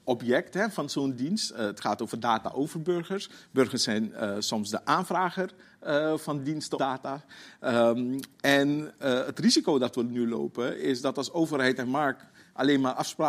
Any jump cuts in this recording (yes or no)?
yes